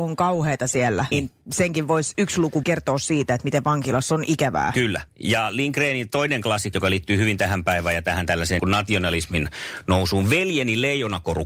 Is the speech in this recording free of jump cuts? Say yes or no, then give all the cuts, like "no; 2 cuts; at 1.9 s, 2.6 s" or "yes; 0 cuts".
no; 5 cuts; at 1.1 s, 2.1 s, 2.6 s, 6.7 s, 8.6 s